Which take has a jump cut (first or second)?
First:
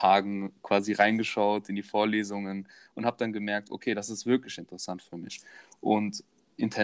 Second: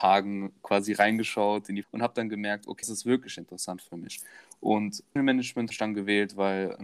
second